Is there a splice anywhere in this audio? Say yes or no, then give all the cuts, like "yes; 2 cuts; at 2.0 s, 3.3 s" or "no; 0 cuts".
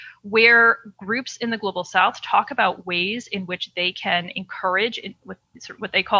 no; 0 cuts